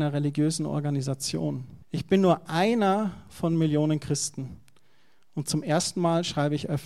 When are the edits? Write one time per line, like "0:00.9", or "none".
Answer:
0:01.8